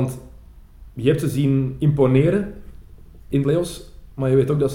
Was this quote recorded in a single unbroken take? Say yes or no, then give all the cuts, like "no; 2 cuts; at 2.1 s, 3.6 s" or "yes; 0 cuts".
no; 1 cut; at 3.4 s